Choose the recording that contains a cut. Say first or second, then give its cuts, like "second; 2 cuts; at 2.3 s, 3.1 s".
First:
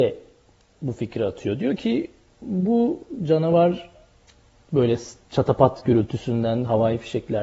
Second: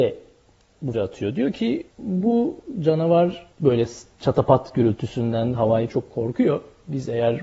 second; 4 cuts; at 0.9 s, 1.9 s, 3.5 s, 5.9 s